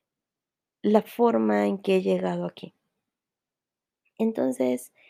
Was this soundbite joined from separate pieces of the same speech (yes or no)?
no